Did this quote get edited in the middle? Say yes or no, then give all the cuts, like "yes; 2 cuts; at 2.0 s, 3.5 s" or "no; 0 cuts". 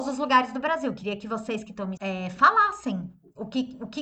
yes; 1 cut; at 2.0 s